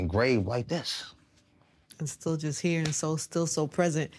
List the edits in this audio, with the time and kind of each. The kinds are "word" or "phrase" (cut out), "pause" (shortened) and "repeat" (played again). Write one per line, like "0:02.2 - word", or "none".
none